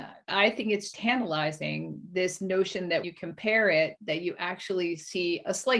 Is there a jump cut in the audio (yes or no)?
yes